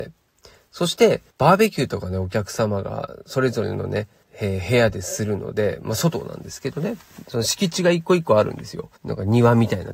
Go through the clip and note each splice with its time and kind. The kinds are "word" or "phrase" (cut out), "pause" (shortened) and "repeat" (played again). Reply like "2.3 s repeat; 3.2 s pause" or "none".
1.3 s pause; 4.2 s pause; 9.0 s pause

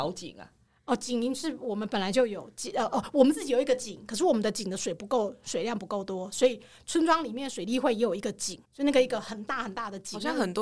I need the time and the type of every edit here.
8.6 s pause

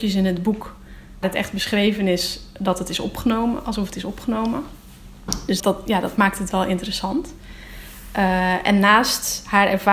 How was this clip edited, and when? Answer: 1.2 s word; 5.6 s word

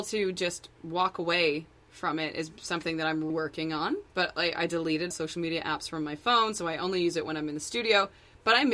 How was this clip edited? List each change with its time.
3.3 s word; 4.1 s pause; 5.1 s word

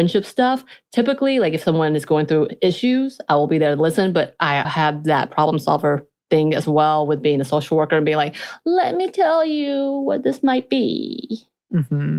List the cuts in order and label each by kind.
4.6 s word

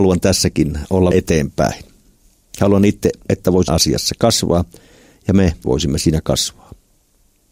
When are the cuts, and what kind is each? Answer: 1.1 s word; 3.3 s word; 3.7 s word; 5.6 s word

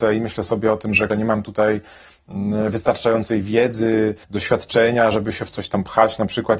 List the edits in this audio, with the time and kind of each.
1.1 s word; 4.2 s pause

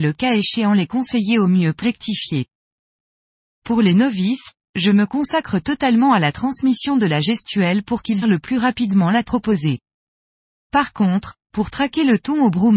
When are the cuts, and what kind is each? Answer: 1.8 s word; 8.2 s word; 9.2 s word

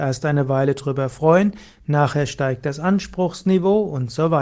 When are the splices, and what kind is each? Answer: none

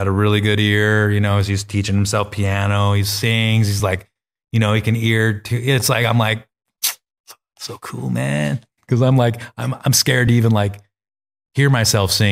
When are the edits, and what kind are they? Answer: none

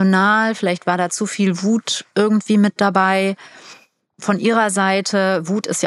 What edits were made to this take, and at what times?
none

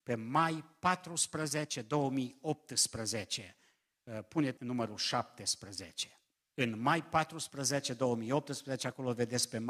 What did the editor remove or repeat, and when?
4.6 s phrase; 6.3 s pause

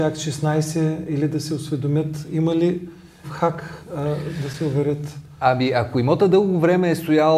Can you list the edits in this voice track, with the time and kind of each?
3.2 s word

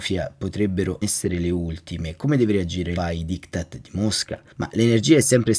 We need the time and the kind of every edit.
1.0 s word; 3.0 s word; 4.5 s pause

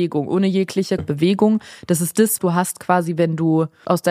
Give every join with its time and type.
1.0 s word; 2.4 s word

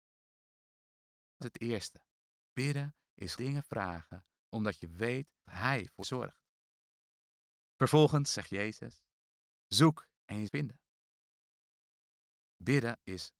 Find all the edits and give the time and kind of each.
1.4 s word; 3.4 s word; 5.5 s word; 6.0 s word; 10.5 s word

